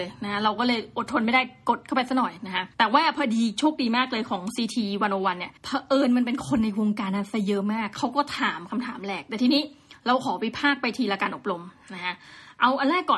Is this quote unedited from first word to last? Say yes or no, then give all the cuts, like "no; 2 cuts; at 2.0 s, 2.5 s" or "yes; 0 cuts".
no; 2 cuts; at 2.7 s, 5.6 s